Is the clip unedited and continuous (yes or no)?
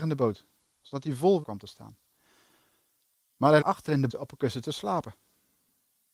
no